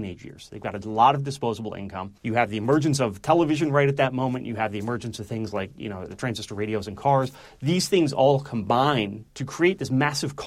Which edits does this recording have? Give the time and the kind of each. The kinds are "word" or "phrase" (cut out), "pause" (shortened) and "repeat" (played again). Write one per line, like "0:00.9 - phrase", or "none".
0:02.2 - pause